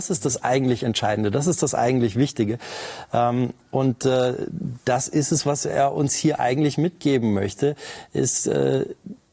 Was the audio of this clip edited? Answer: no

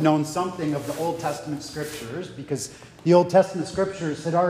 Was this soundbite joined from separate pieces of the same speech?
no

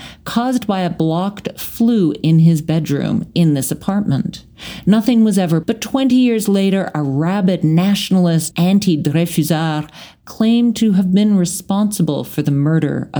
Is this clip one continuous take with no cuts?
no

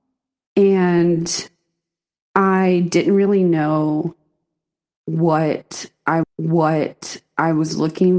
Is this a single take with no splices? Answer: no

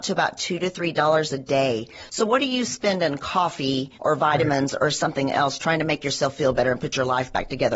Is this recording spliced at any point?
yes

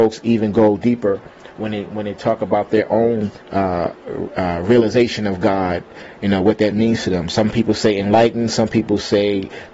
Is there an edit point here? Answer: yes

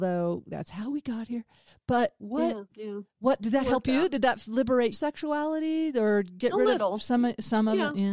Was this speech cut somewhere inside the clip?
yes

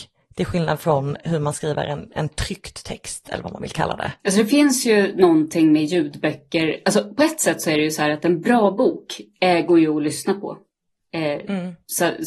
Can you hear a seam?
yes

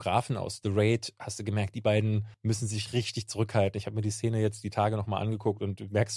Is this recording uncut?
no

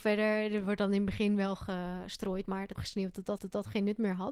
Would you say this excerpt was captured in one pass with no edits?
no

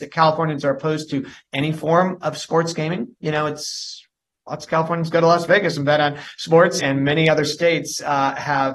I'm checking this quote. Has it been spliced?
yes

